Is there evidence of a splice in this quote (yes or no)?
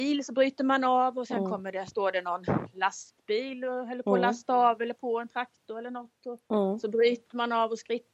no